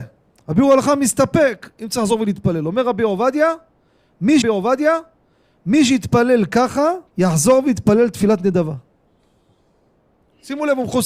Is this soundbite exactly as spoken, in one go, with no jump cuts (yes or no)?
no